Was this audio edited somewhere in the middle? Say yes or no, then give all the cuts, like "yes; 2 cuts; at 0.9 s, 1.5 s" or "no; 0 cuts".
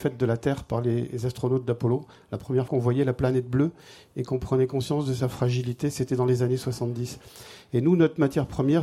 yes; 1 cut; at 2.7 s